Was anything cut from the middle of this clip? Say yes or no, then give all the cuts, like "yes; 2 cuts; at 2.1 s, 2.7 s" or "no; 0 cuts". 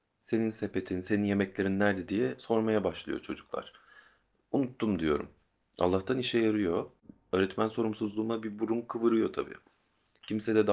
no; 0 cuts